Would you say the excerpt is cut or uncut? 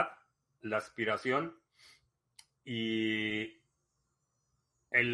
uncut